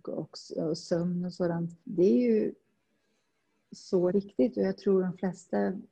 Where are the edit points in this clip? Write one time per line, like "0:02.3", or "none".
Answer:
0:01.8
0:04.1